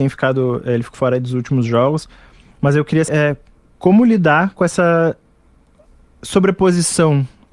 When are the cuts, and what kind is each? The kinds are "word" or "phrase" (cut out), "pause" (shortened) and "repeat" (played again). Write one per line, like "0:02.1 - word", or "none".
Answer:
0:00.9 - word
0:03.1 - word